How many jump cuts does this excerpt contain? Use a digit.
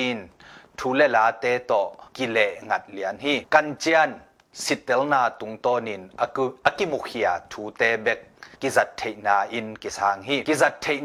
2